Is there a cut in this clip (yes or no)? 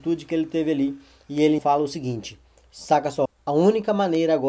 yes